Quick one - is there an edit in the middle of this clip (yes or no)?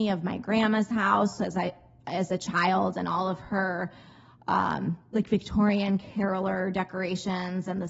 no